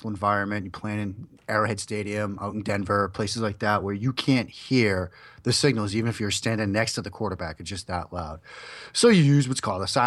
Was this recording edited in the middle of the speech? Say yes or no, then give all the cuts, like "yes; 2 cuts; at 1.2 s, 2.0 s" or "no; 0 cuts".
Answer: no; 0 cuts